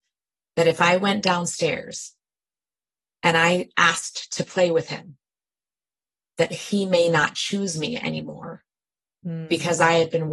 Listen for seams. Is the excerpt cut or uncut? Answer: uncut